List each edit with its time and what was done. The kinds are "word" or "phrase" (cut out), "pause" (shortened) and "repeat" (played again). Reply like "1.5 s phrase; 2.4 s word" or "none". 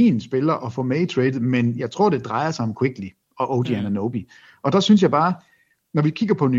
none

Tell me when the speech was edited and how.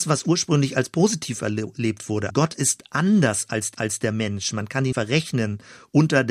2.3 s word; 3.7 s repeat; 4.9 s word

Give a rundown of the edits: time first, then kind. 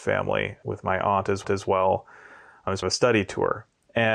1.4 s repeat; 2.8 s word

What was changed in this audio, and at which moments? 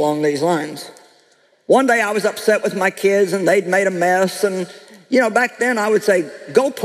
none

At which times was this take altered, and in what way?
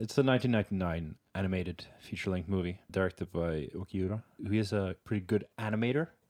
3.7 s word

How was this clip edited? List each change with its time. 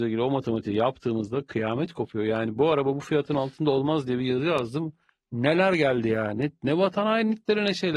none

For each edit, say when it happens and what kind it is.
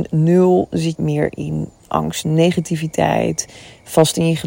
0.9 s word; 2.2 s word

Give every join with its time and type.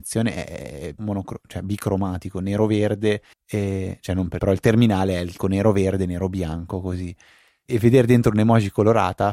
1.0 s word; 3.3 s pause; 4.4 s word; 5.4 s word; 7.7 s word

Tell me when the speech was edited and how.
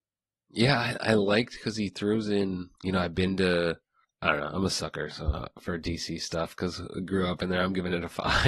2.7 s pause; 4.0 s pause

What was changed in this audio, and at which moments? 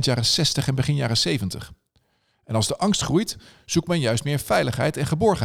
none

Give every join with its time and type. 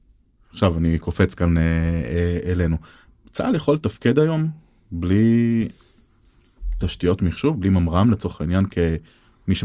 none

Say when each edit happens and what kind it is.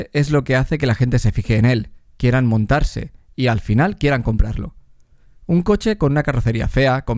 none

